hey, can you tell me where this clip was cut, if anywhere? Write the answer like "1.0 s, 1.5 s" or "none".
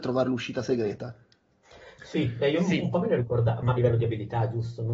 3.8 s